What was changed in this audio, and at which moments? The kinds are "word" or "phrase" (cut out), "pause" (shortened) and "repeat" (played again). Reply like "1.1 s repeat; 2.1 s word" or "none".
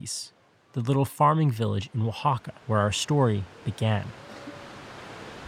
2.6 s pause